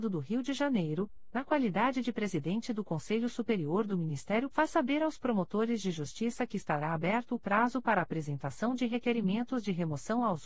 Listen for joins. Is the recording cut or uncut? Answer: cut